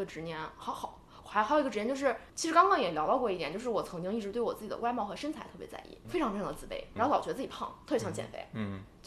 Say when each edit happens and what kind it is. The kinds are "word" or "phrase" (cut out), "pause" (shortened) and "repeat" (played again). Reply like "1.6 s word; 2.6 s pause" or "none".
2.3 s pause; 6.0 s word; 7.0 s word

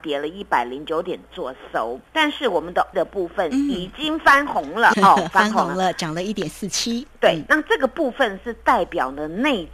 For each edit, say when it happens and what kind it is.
2.1 s pause; 2.9 s word; 4.9 s word

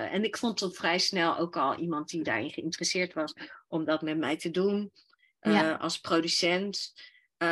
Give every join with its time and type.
none

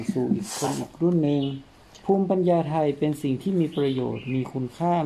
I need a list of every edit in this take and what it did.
2.0 s pause

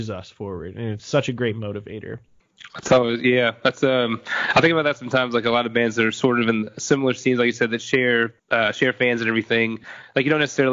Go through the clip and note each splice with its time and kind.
1.0 s word; 8.4 s pause

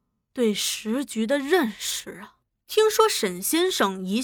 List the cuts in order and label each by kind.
2.5 s pause

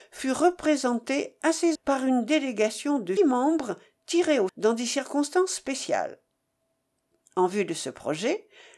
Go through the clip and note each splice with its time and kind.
1.7 s word; 3.2 s word; 4.5 s word

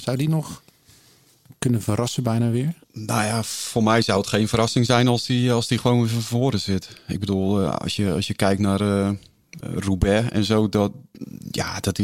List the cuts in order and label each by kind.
2.8 s pause; 9.6 s word

